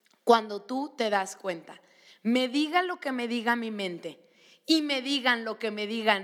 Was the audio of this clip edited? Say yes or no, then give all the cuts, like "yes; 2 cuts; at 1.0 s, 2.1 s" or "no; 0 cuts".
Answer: no; 0 cuts